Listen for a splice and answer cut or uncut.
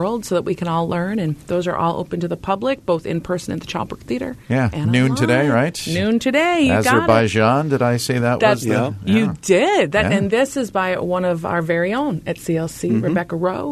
uncut